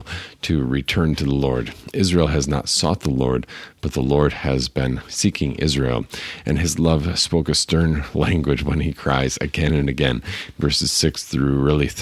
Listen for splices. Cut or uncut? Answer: uncut